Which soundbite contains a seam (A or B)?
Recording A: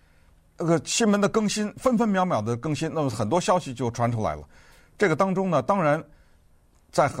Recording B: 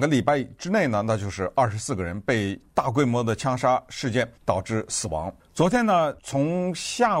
B